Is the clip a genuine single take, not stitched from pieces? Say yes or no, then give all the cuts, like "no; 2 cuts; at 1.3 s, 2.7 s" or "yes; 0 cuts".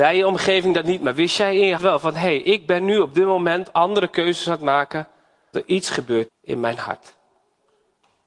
no; 3 cuts; at 1.8 s, 5.5 s, 6.3 s